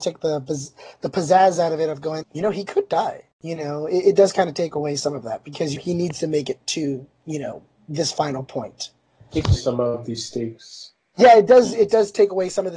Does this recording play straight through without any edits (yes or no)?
no